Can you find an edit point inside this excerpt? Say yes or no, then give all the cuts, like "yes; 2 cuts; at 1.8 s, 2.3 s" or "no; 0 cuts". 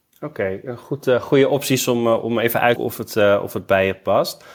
yes; 1 cut; at 2.8 s